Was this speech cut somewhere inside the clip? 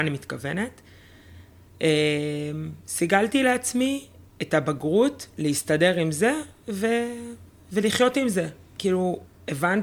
no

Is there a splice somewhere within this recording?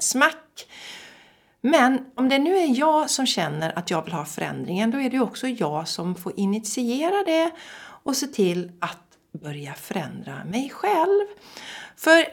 no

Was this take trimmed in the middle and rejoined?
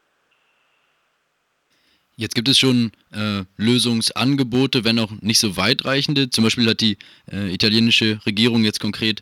no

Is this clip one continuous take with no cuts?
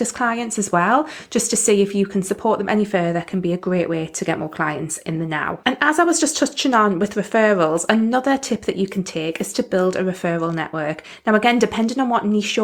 yes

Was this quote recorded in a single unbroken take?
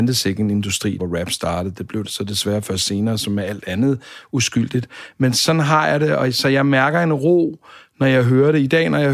no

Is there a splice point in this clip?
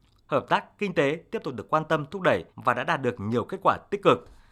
yes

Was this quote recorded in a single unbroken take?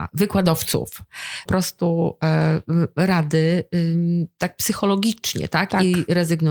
no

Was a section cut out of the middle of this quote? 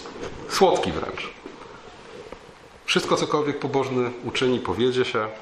no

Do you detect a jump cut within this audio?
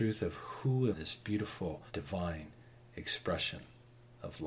yes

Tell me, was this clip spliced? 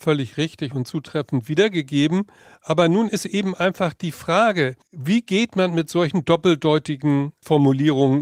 no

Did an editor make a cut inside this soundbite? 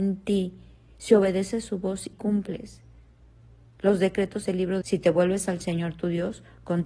yes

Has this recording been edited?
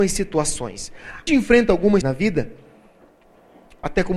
yes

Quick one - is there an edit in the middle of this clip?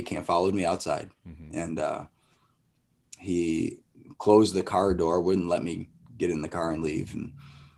no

